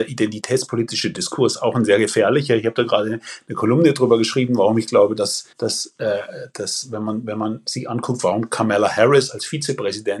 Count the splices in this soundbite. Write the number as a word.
one